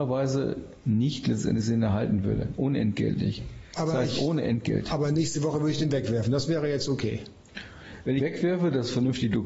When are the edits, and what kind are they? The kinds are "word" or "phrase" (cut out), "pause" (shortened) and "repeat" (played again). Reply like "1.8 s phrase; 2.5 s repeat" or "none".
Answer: 8.2 s phrase

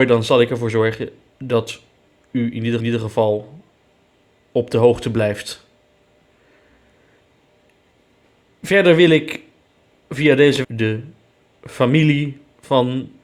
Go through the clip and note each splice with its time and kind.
2.8 s repeat; 10.6 s word

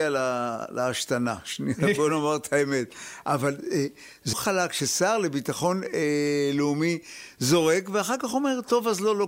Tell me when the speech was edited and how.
4.3 s phrase

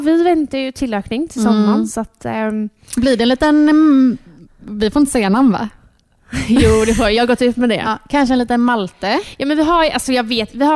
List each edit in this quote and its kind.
none

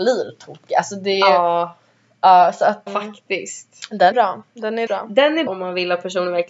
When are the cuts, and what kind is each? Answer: 2.9 s word; 4.1 s word; 4.9 s word; 5.5 s word

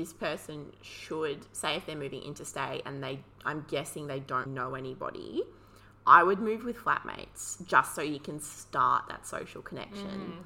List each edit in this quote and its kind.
4.5 s word

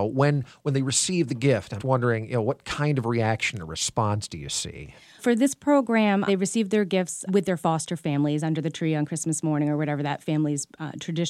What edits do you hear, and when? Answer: 1.8 s word; 5.2 s word; 6.3 s word; 7.3 s word

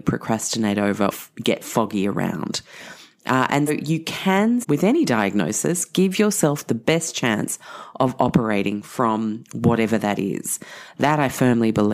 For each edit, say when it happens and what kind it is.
1.1 s word; 3.7 s word; 4.6 s word

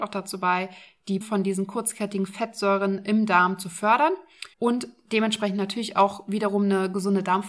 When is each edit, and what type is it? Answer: 1.2 s word; 4.5 s pause

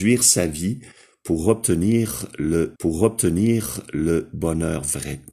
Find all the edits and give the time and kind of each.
2.8 s repeat

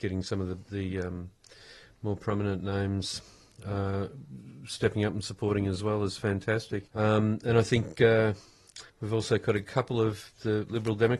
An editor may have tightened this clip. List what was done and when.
6.9 s pause; 8.9 s pause

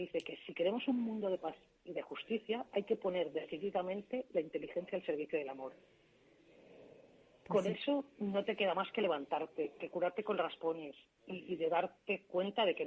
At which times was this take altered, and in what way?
none

